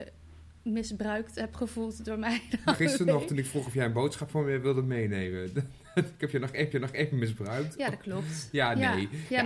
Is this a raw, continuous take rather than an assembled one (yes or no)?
no